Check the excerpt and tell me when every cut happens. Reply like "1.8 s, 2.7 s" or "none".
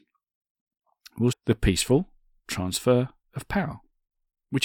1.3 s